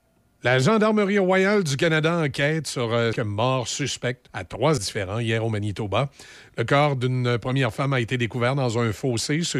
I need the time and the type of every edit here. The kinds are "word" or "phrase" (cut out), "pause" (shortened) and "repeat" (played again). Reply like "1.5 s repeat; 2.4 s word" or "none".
3.1 s word; 4.3 s word; 4.8 s word